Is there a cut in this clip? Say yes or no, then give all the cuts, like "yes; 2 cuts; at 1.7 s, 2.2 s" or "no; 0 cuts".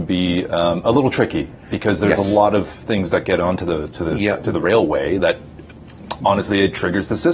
no; 0 cuts